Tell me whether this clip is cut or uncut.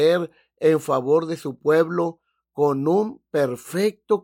uncut